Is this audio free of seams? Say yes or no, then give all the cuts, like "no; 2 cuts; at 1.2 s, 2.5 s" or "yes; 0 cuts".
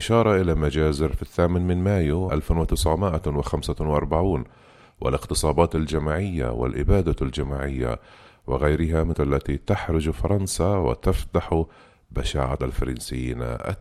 no; 3 cuts; at 2.3 s, 9.1 s, 12.6 s